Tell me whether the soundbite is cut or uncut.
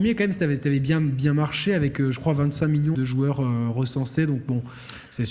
cut